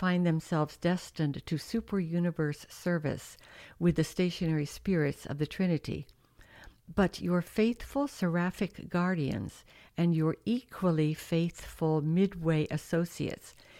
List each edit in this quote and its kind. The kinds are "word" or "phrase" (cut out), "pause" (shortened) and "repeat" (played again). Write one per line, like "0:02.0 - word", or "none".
none